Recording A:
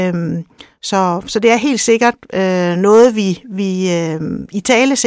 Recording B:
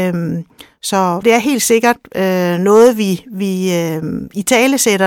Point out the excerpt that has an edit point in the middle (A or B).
B